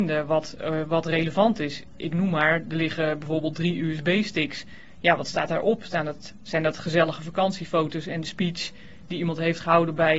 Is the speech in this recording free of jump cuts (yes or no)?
yes